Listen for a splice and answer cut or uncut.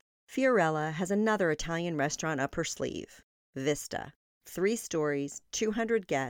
uncut